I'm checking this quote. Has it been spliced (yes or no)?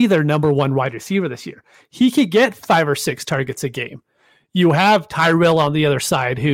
no